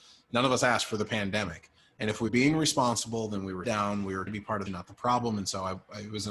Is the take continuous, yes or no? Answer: no